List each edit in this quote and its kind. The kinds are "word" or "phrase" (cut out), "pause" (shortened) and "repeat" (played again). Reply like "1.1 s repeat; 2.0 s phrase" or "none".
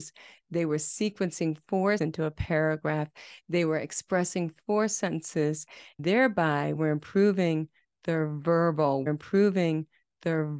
2.0 s word; 6.7 s word; 9.1 s repeat